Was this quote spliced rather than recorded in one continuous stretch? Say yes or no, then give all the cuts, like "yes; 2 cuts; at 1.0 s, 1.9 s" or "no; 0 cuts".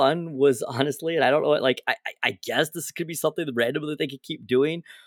no; 0 cuts